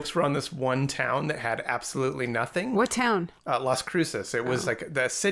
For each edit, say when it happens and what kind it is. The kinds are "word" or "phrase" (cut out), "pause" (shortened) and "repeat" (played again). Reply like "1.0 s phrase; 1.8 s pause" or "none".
3.4 s pause